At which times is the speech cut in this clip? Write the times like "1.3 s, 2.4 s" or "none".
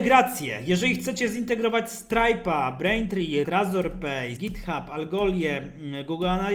3.4 s, 4.4 s

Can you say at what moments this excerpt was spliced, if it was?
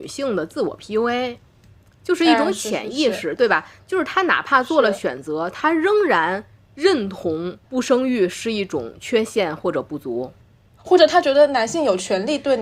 7.6 s, 10.4 s

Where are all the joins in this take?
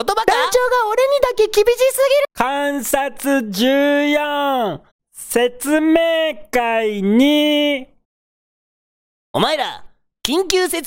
none

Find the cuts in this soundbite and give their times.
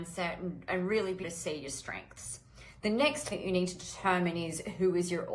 1.2 s, 3.3 s

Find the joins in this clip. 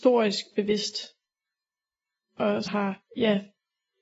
2.7 s, 3.1 s

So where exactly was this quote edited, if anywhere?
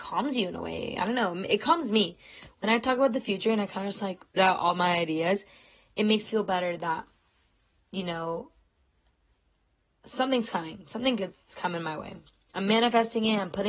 4.4 s, 6.2 s

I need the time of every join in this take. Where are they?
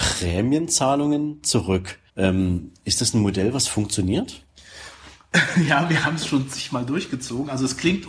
2.1 s

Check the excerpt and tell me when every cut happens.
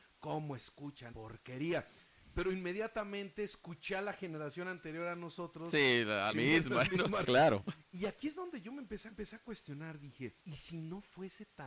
1.1 s, 6.3 s, 7.2 s, 9.1 s, 10.4 s

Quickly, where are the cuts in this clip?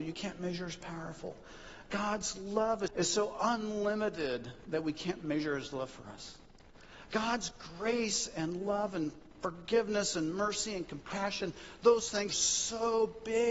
2.9 s, 12.3 s

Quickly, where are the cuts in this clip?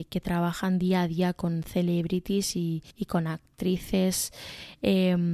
2.9 s

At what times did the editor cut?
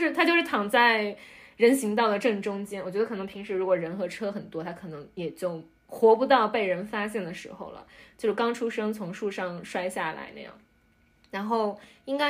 none

